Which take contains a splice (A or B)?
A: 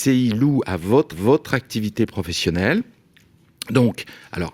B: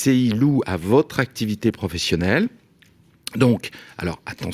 A